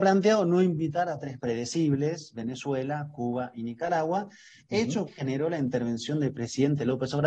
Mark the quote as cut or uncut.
cut